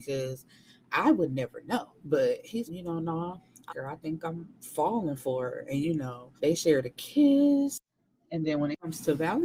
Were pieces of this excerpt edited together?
yes; 4 cuts; at 2.0 s, 2.7 s, 3.7 s, 6.4 s

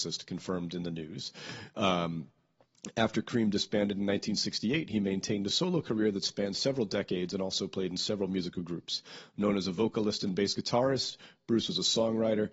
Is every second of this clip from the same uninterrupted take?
yes; 0 cuts

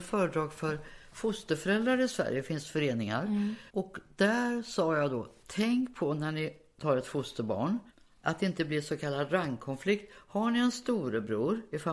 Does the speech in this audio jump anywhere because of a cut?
yes; 2 cuts; at 3.7 s, 7.9 s

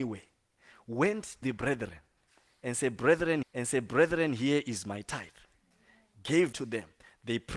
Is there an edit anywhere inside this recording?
yes; 3 cuts; at 1.4 s, 3.4 s, 6.5 s

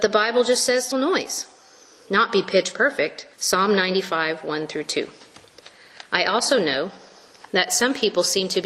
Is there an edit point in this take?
yes; 2 cuts; at 0.9 s, 3.3 s

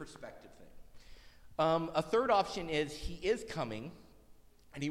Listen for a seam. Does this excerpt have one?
no; 0 cuts

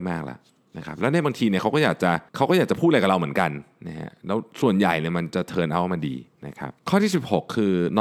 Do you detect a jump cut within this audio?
yes; 2 cuts; at 2.3 s, 6.8 s

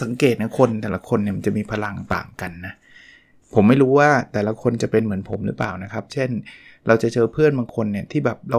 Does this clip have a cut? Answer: no; 0 cuts

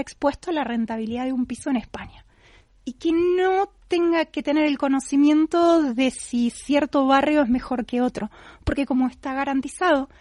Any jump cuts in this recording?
no; 0 cuts

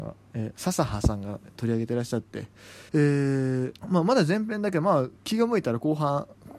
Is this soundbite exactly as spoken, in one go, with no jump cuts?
no; 3 cuts; at 2.9 s, 3.8 s, 5.2 s

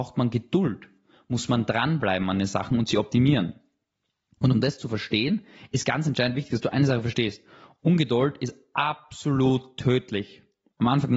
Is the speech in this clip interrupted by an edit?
no; 0 cuts

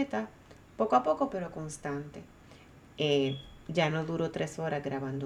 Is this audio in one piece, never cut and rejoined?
yes; 0 cuts

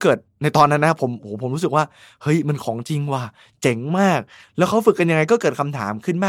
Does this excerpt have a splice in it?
no; 0 cuts

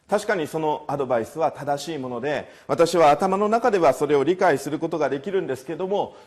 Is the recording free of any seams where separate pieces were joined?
yes; 0 cuts

